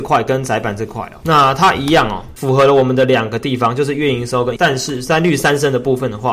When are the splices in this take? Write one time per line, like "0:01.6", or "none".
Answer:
0:04.6